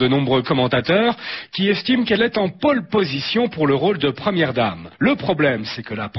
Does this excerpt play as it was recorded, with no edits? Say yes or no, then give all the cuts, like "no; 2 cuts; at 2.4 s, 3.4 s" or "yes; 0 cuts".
yes; 0 cuts